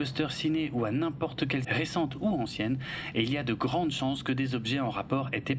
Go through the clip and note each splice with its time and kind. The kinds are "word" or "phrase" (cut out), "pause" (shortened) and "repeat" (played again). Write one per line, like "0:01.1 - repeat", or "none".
0:01.6 - phrase

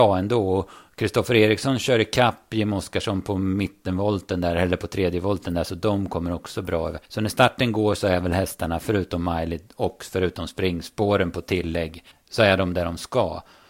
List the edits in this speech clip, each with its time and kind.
0:07.0 - pause
0:12.1 - pause

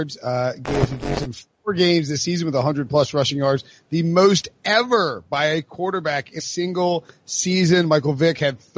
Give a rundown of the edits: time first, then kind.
0:06.4 - word

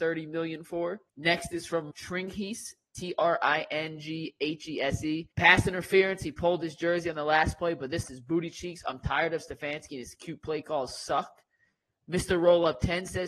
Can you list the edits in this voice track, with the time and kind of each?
0:01.1 - pause
0:01.9 - word
0:05.3 - pause
0:08.0 - word

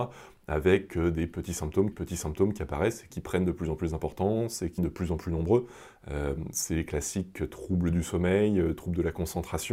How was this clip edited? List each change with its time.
0:01.9 - repeat
0:03.1 - word
0:04.8 - word

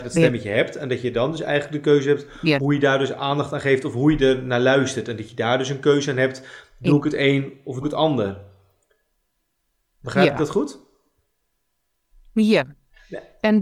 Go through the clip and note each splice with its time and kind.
0:07.8 - phrase

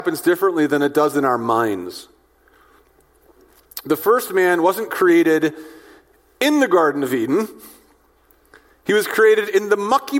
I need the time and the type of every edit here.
none

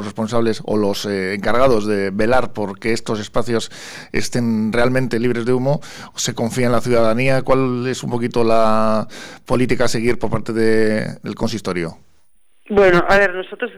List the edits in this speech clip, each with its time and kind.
none

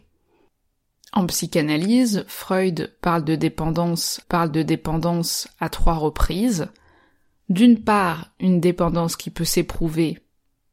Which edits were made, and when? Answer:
0:04.2 - repeat

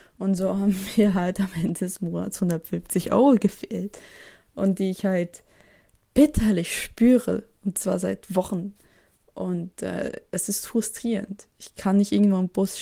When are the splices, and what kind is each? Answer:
none

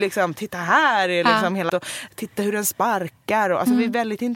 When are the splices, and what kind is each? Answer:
0:01.7 - word

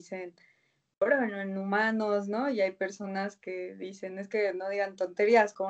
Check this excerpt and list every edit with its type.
none

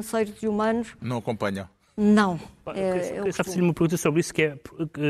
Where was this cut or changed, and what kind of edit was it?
none

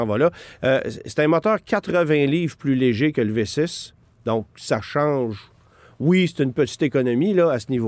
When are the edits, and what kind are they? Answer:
none

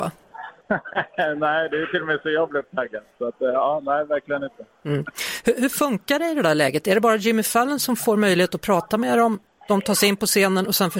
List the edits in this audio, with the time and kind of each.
none

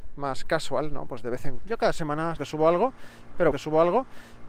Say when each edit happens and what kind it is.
0:01.6 - phrase
0:02.4 - word
0:03.5 - repeat

